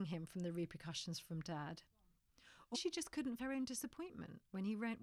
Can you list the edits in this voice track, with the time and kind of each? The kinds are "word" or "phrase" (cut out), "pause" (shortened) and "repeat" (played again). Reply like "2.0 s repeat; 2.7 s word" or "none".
2.7 s word; 3.4 s word